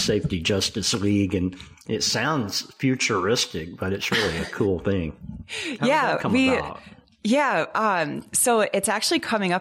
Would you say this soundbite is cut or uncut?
uncut